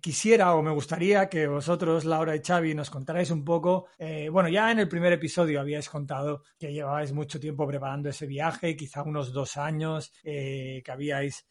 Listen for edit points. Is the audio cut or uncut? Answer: cut